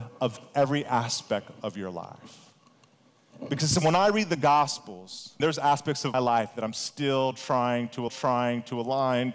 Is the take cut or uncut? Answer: cut